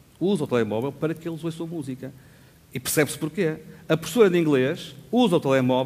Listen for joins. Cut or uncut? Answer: uncut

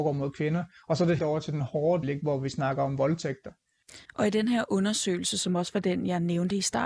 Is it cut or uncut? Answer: cut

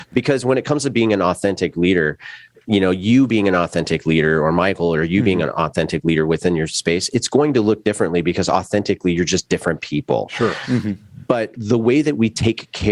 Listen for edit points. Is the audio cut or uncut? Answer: uncut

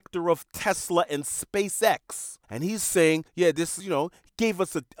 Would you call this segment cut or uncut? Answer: cut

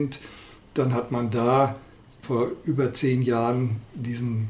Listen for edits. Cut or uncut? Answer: uncut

